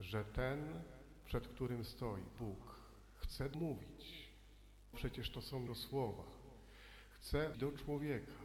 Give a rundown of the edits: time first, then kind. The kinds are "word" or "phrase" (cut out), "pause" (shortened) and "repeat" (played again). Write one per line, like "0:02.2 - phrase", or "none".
0:02.4 - word
0:03.5 - word
0:04.9 - word
0:05.7 - word
0:07.5 - word